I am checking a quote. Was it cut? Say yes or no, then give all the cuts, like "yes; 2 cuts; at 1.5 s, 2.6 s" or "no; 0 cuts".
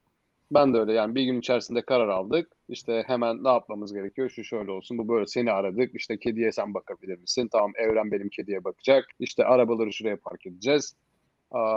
yes; 2 cuts; at 2.5 s, 9.1 s